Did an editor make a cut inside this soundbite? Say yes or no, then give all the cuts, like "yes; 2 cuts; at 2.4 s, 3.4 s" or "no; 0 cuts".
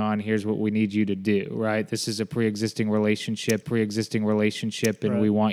yes; 1 cut; at 3.6 s